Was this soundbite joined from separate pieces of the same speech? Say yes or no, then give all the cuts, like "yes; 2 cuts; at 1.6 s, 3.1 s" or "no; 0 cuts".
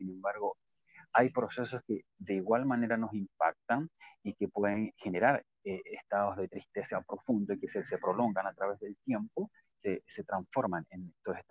no; 0 cuts